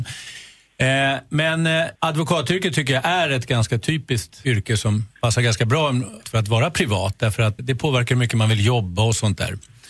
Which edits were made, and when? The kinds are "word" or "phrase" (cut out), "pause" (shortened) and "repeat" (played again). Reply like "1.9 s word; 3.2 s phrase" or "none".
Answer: 2.0 s pause; 4.4 s word; 5.2 s pause; 6.2 s word; 7.6 s word